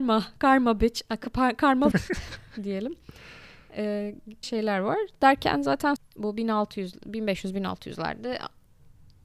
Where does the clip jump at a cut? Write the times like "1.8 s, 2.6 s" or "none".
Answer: 1.9 s, 4.4 s, 6.0 s